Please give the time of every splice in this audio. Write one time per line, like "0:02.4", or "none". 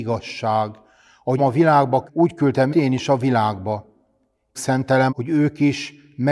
0:01.4
0:02.1
0:02.7
0:04.6
0:05.1